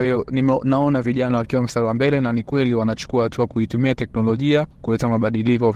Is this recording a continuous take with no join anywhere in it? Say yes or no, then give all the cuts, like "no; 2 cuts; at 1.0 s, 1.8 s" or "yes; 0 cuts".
yes; 0 cuts